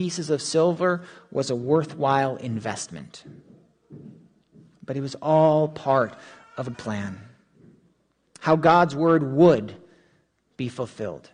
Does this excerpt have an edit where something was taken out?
yes; 1 cut; at 6.7 s

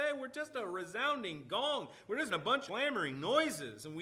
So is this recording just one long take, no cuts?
no; 2 cuts; at 2.3 s, 2.7 s

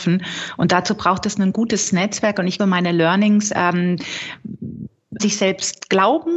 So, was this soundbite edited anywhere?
yes; 2 cuts; at 2.6 s, 5.2 s

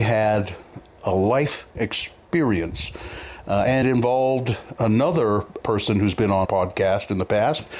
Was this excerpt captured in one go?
no; 4 cuts; at 1.8 s, 3.8 s, 5.6 s, 6.5 s

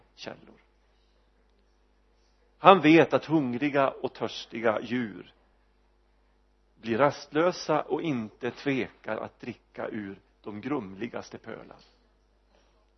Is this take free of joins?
yes; 0 cuts

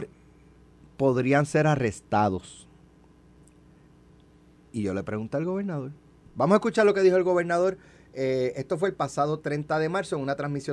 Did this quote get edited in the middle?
no; 0 cuts

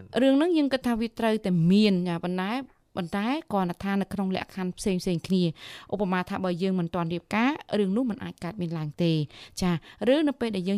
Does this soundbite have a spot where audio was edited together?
no; 0 cuts

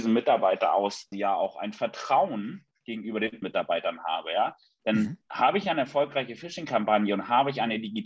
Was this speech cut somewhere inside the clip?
yes; 3 cuts; at 1.1 s, 3.4 s, 5.2 s

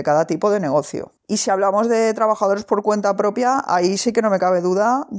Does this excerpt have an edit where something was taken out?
yes; 1 cut; at 1.2 s

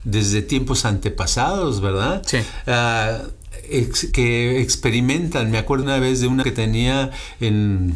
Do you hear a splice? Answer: yes; 3 cuts; at 4.1 s, 5.8 s, 6.4 s

